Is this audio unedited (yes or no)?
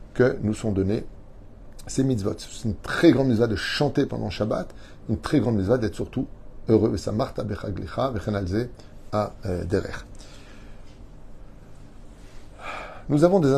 yes